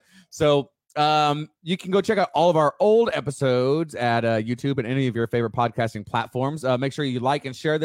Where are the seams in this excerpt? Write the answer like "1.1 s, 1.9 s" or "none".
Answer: none